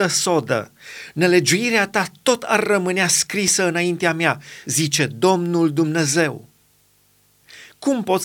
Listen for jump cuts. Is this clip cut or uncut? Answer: uncut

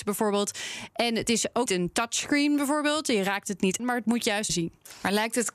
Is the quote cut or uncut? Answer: cut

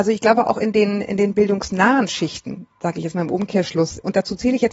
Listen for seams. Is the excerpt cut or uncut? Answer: uncut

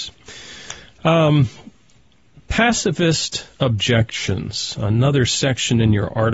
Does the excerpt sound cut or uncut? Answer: uncut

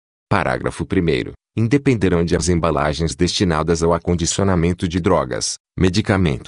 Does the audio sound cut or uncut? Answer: cut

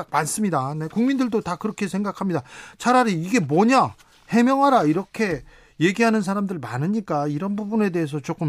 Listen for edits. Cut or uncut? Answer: uncut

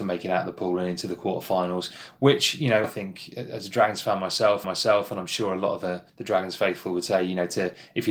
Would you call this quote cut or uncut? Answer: cut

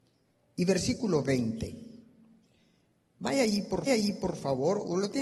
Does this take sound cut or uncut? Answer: cut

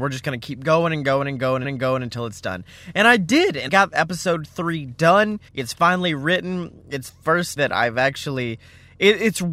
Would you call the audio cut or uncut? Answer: cut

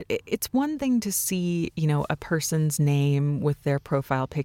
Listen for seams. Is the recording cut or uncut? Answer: uncut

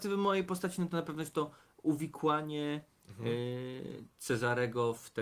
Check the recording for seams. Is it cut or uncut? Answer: uncut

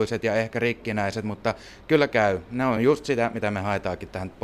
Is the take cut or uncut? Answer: uncut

